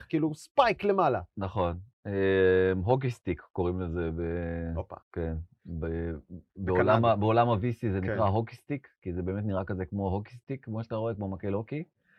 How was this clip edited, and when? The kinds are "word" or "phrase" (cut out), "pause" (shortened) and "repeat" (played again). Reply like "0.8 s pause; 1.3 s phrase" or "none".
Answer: 5.0 s pause; 6.5 s pause